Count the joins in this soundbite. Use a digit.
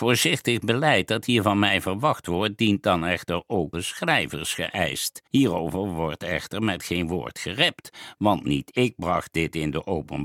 2